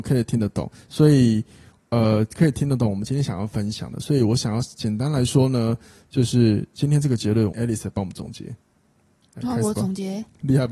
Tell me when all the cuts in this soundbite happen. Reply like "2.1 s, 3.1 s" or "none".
7.5 s